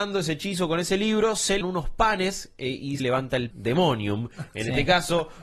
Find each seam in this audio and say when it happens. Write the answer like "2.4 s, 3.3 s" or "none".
1.6 s, 3.0 s, 3.5 s

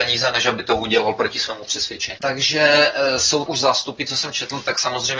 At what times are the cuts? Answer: 3.5 s

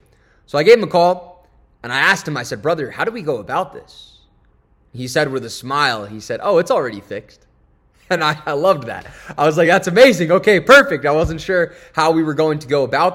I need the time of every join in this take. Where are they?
none

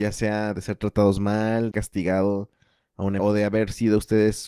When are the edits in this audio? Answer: 1.7 s, 3.2 s

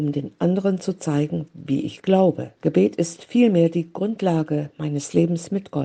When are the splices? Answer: 2.6 s

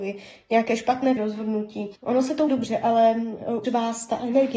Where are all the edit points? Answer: 1.2 s, 2.0 s, 2.5 s, 3.6 s

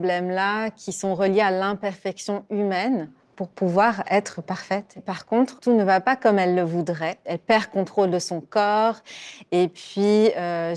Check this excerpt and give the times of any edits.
none

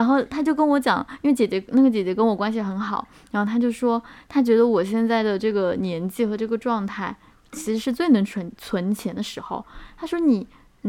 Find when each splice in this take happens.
none

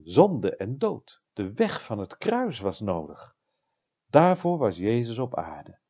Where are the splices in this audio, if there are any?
1.3 s

